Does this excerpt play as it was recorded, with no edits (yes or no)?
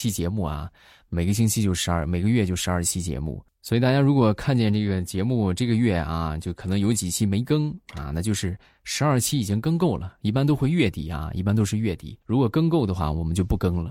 no